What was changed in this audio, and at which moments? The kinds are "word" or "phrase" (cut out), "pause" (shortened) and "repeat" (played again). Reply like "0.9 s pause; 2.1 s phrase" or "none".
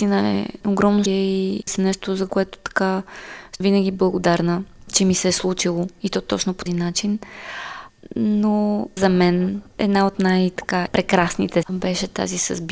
1.1 s word; 1.7 s word; 3.6 s word; 6.7 s word; 9.0 s word; 11.6 s word